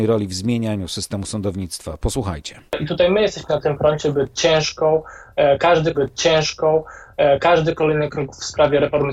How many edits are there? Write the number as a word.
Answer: three